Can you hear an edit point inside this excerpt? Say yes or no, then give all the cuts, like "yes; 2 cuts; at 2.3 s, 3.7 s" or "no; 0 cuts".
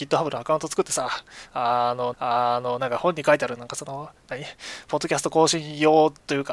yes; 1 cut; at 2.1 s